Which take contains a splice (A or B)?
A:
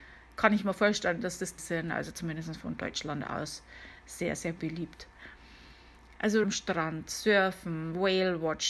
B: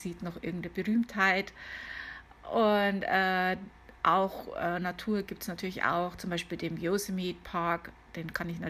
A